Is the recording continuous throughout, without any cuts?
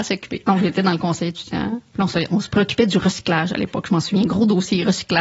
yes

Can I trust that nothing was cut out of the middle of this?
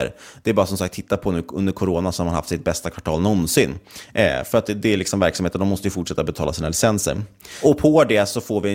yes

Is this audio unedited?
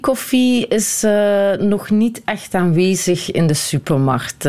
yes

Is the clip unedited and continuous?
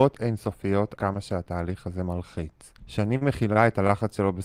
no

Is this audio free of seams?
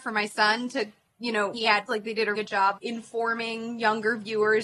no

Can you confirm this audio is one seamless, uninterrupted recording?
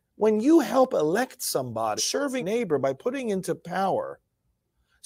no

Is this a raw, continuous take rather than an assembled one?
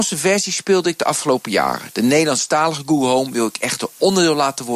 yes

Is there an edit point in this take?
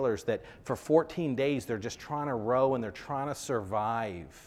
no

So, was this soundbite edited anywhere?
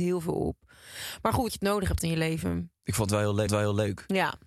yes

